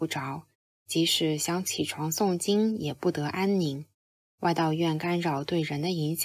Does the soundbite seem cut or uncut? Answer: uncut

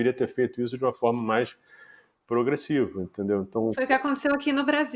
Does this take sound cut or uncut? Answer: uncut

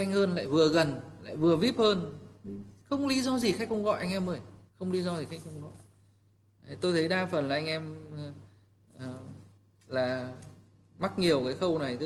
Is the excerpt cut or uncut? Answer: cut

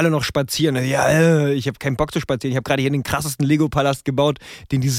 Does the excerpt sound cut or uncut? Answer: uncut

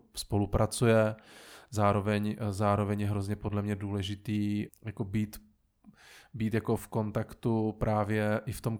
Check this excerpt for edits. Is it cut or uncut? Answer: cut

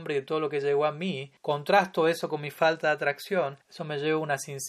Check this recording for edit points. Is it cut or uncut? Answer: cut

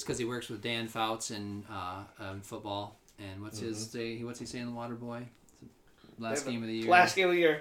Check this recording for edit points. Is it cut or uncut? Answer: uncut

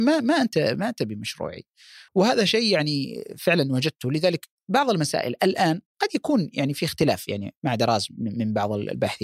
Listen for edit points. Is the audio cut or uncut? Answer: cut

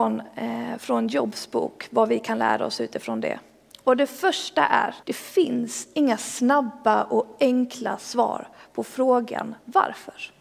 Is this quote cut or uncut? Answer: cut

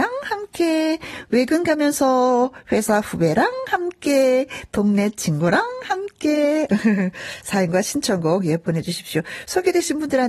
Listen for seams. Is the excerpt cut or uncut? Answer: uncut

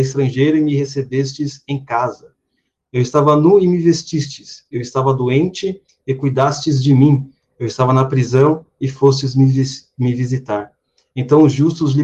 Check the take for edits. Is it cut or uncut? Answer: uncut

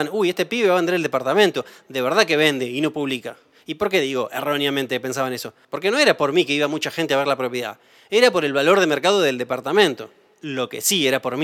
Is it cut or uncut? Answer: uncut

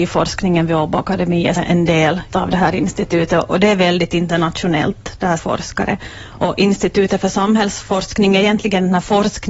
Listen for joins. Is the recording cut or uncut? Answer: cut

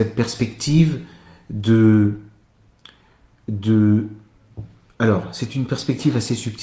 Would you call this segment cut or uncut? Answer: uncut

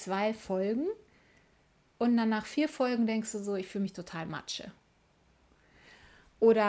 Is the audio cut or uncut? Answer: uncut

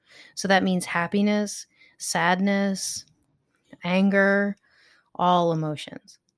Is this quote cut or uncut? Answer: cut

